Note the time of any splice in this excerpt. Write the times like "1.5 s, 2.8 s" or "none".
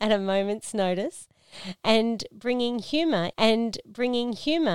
3.3 s